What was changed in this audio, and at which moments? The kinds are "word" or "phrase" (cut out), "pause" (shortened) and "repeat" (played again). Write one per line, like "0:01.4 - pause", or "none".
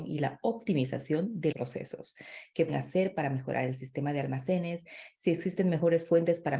0:01.5 - word
0:02.7 - word